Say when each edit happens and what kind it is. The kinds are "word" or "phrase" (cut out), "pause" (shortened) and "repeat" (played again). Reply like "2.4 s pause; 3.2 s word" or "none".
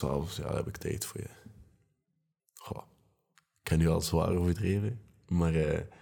none